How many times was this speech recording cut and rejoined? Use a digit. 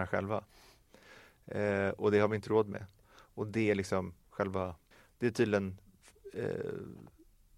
2